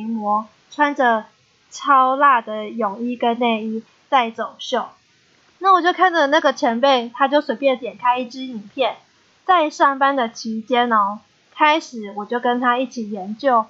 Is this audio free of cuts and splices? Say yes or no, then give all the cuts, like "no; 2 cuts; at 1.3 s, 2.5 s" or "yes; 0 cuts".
yes; 0 cuts